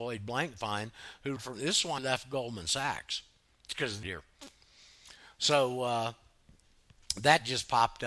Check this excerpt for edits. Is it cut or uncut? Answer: cut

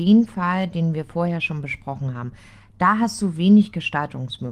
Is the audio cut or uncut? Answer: uncut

